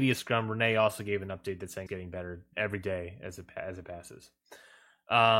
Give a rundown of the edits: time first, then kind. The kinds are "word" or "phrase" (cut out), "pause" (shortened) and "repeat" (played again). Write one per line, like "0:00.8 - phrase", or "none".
0:01.9 - word
0:02.5 - word

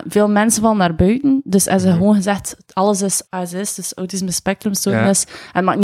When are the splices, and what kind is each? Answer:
0:03.3 - pause

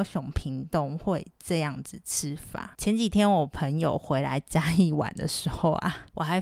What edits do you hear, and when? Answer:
none

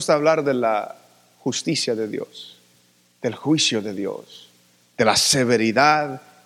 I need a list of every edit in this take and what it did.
none

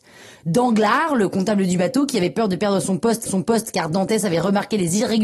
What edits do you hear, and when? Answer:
0:03.3 - repeat

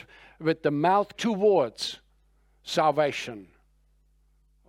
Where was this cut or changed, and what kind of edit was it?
0:01.1 - phrase

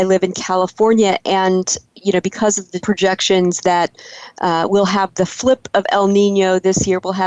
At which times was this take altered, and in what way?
0:02.8 - phrase

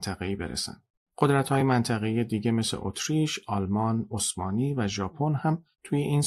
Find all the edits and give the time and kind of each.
none

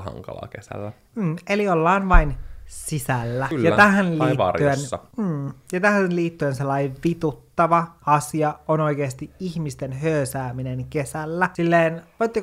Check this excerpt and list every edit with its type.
none

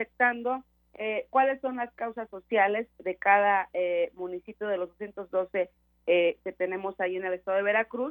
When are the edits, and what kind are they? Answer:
none

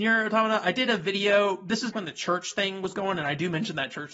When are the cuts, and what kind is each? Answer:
0:01.9 - word
0:03.1 - word

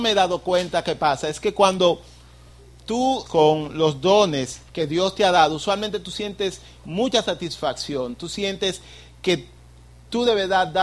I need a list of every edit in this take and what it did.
0:03.3 - word
0:04.7 - pause

